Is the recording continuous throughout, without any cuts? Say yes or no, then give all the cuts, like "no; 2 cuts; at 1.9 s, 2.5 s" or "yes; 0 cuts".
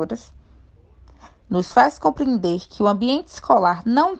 yes; 0 cuts